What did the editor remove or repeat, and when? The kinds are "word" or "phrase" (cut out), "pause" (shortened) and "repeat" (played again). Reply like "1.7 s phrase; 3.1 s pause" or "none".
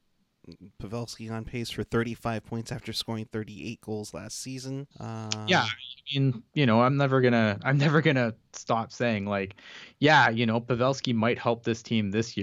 4.9 s pause; 6.5 s pause